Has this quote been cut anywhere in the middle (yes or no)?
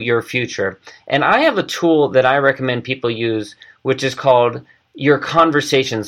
no